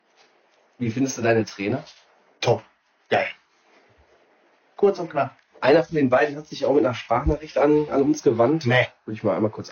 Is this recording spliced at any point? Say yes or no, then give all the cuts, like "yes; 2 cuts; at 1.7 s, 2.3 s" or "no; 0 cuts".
no; 0 cuts